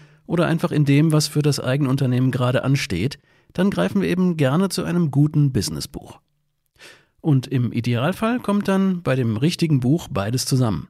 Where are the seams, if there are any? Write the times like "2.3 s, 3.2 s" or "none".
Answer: none